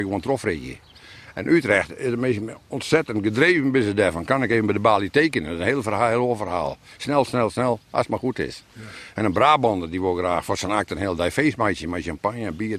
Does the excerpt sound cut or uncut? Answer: uncut